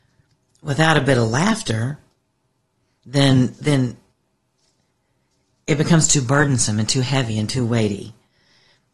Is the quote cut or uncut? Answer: uncut